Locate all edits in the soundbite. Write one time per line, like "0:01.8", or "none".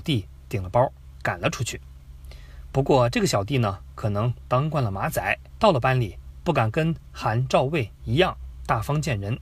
0:05.6